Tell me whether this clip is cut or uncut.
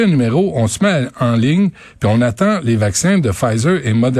uncut